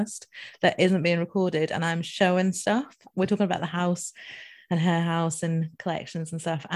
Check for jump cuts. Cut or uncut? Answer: uncut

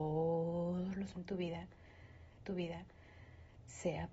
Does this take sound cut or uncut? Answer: cut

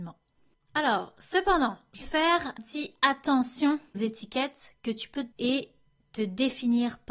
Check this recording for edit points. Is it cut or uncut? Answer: cut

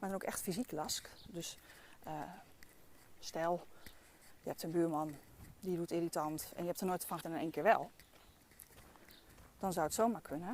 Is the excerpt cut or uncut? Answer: cut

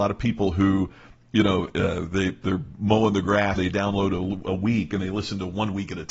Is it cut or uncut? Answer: cut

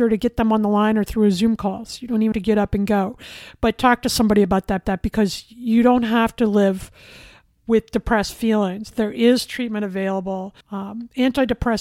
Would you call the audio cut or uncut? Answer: cut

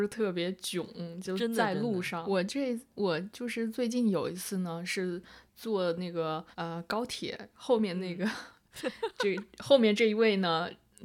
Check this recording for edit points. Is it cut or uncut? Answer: cut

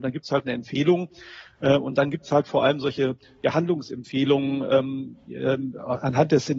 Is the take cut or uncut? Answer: uncut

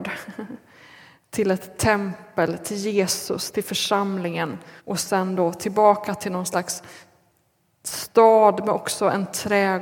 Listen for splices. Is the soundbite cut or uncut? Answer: cut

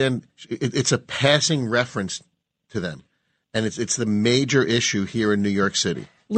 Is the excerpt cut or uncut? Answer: uncut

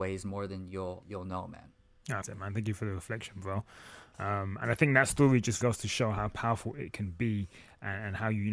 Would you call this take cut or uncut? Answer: cut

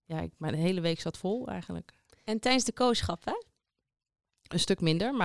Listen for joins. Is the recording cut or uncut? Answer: uncut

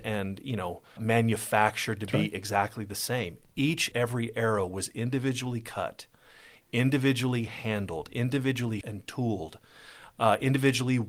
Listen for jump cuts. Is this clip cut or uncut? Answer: cut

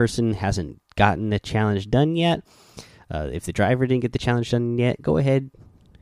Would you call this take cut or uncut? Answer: uncut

